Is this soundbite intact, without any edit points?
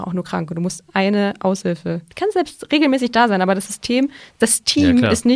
no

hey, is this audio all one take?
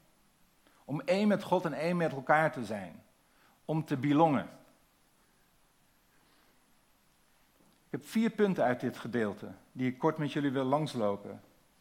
yes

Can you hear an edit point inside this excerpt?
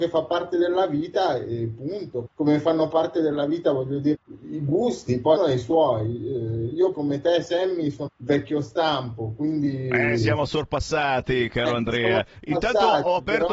yes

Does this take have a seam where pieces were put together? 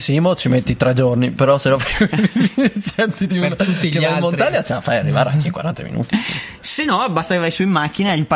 no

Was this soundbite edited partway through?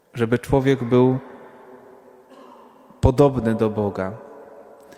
no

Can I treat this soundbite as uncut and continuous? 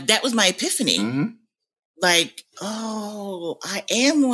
yes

